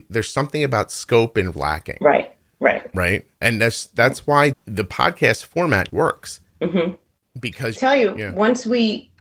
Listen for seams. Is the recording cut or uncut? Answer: cut